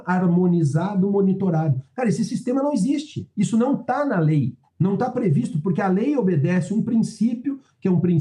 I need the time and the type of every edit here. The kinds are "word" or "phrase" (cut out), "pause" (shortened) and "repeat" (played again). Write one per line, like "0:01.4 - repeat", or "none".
0:04.7 - pause